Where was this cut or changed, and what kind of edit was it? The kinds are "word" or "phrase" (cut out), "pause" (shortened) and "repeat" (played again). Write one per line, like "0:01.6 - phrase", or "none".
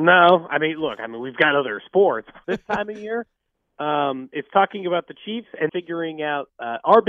0:05.7 - word